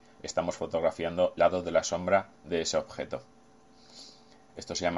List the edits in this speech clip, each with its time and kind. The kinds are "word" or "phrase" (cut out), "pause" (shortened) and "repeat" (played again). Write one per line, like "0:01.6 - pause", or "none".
0:01.4 - word
0:02.3 - pause